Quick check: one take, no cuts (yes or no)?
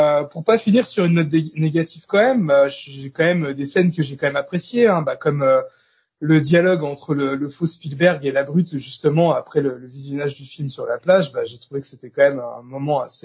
yes